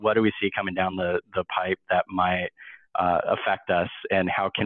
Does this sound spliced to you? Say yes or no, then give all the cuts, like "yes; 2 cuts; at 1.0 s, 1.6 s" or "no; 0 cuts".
no; 0 cuts